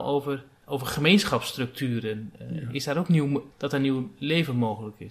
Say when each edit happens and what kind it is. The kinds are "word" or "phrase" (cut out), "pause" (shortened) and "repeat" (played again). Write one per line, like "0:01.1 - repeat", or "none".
0:03.5 - pause